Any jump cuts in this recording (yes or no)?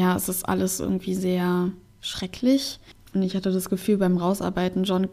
no